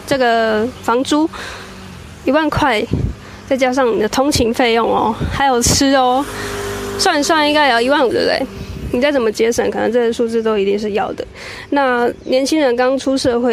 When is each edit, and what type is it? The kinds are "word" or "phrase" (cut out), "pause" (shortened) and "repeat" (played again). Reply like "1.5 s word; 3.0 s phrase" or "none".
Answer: 8.1 s phrase